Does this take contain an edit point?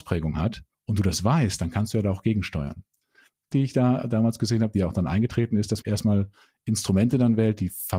yes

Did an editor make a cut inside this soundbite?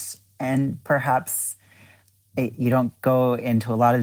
no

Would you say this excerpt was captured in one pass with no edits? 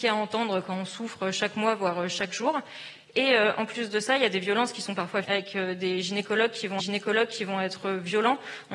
no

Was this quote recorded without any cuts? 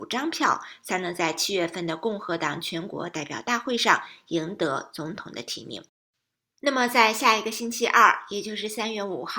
yes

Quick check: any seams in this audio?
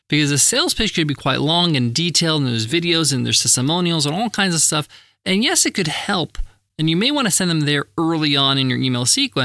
no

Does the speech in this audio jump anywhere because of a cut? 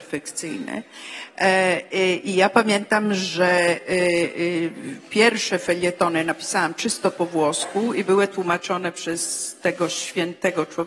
no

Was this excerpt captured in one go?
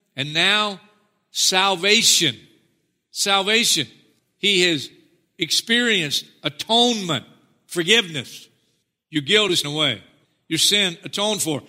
no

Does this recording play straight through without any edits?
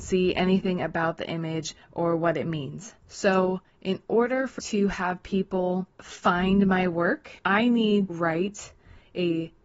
no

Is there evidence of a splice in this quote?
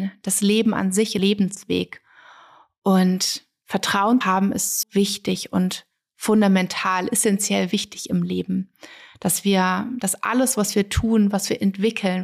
yes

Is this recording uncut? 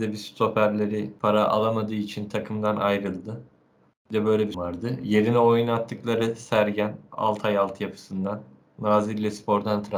no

